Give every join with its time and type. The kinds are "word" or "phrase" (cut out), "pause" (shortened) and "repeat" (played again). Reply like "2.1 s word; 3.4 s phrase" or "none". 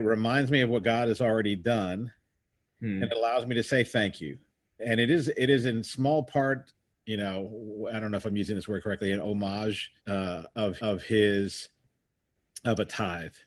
4.8 s word; 10.0 s pause; 10.8 s repeat